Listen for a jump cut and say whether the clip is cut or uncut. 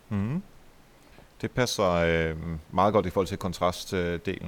uncut